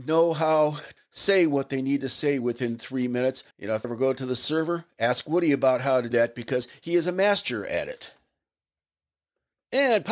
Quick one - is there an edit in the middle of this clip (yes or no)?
yes